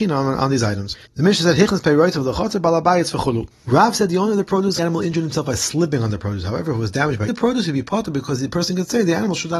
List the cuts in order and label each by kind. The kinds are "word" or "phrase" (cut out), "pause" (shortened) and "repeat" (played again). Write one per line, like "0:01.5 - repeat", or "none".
0:01.1 - pause
0:03.5 - pause
0:04.8 - phrase
0:07.3 - word